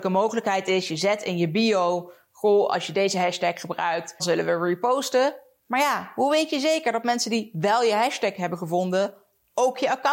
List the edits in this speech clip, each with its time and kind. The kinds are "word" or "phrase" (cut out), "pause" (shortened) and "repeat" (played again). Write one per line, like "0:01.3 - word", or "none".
0:04.2 - word

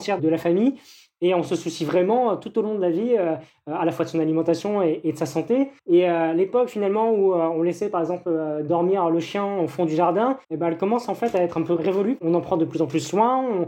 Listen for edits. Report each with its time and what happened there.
0:05.8 - pause
0:10.4 - pause

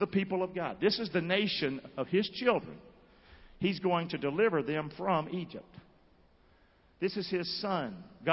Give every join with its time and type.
none

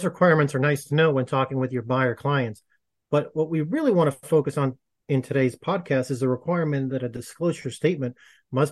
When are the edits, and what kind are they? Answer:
none

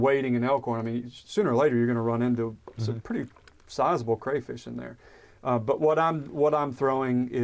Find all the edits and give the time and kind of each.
none

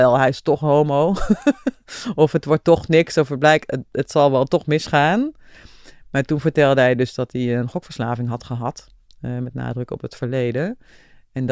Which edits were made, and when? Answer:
none

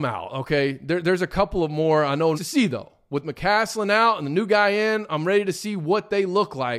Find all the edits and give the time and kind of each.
0:02.3 - phrase

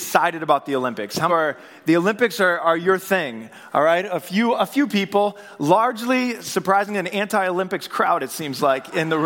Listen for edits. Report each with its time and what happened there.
0:01.3 - phrase

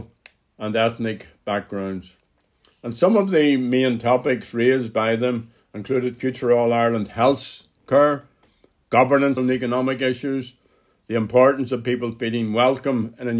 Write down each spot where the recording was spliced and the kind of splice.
0:09.4 - phrase

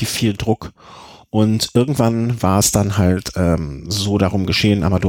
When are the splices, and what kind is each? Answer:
none

